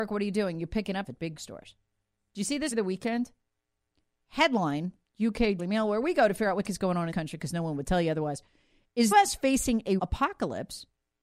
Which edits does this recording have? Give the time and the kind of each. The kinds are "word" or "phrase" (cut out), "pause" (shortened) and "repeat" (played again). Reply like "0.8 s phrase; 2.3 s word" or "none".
1.0 s word; 1.4 s word; 2.7 s word; 5.6 s word; 6.6 s word; 7.1 s word; 9.1 s word; 10.0 s word